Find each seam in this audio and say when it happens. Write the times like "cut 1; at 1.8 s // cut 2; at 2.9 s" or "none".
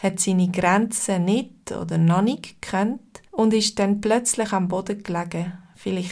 cut 1; at 3.3 s

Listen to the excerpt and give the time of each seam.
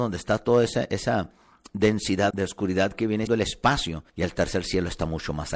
cut 1; at 2.3 s // cut 2; at 3.3 s // cut 3; at 4.1 s

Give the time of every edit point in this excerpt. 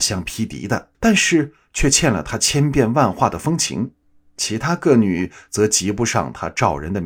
cut 1; at 0.9 s // cut 2; at 4.0 s

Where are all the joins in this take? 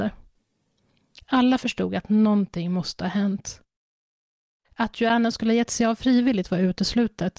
none

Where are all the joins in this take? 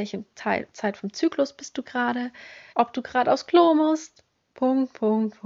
cut 1; at 2.7 s

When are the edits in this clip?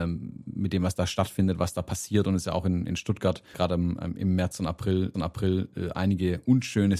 cut 1; at 3.5 s // cut 2; at 5.1 s

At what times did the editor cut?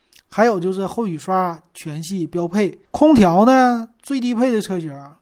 cut 1; at 2.8 s

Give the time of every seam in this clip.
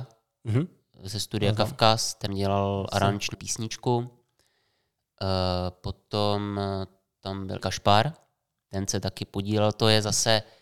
cut 1; at 2.3 s // cut 2; at 3.3 s // cut 3; at 7.6 s

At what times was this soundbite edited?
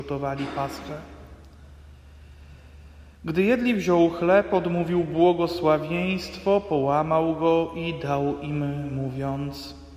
none

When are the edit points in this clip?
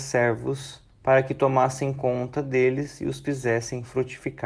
cut 1; at 0.9 s

